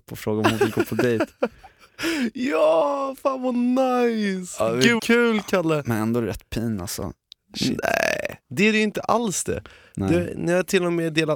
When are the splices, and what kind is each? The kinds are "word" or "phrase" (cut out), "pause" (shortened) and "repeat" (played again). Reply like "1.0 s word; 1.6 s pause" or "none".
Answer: 5.0 s word